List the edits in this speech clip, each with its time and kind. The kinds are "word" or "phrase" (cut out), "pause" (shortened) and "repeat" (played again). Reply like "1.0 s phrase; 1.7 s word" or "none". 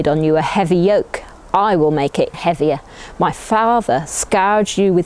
2.3 s word